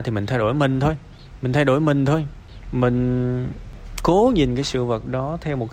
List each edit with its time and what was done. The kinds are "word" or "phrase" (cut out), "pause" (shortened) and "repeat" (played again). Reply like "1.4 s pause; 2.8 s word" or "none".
none